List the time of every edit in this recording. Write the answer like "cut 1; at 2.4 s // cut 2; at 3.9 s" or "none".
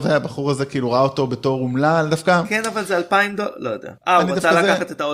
cut 1; at 4.0 s